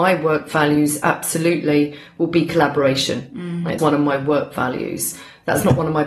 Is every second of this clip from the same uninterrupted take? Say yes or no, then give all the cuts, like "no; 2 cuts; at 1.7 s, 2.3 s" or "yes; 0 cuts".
no; 1 cut; at 3.8 s